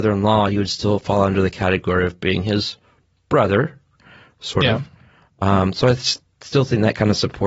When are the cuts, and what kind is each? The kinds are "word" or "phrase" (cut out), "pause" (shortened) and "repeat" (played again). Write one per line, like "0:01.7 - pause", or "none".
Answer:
none